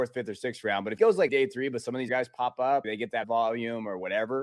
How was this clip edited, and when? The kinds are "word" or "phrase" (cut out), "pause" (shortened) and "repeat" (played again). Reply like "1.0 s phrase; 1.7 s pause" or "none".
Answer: 1.0 s word; 1.3 s word; 2.1 s word; 2.8 s word; 3.2 s word